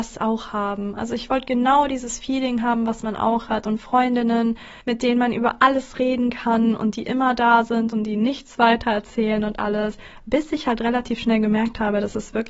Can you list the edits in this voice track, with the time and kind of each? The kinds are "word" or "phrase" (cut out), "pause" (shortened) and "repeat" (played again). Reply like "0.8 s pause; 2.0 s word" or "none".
4.8 s pause